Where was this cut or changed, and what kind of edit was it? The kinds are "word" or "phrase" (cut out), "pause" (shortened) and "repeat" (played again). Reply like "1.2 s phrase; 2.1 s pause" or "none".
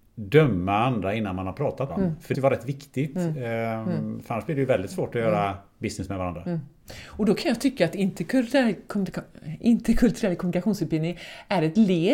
1.9 s word; 2.3 s phrase